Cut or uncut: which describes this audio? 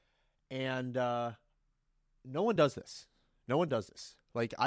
uncut